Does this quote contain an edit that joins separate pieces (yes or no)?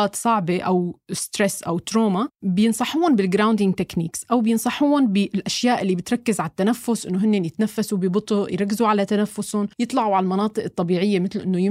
yes